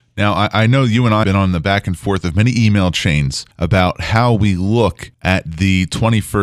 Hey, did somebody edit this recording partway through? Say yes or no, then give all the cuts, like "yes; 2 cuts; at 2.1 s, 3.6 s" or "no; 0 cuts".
yes; 3 cuts; at 1.2 s, 3.5 s, 5.1 s